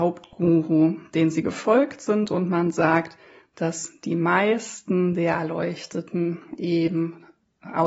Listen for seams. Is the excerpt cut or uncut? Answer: uncut